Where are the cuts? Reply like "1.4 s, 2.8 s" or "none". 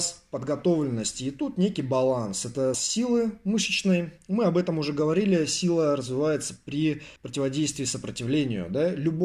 2.7 s, 7.2 s